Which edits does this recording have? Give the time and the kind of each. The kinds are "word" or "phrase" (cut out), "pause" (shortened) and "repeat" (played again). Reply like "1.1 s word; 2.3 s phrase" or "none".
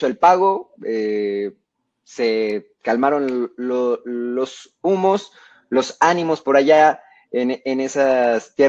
none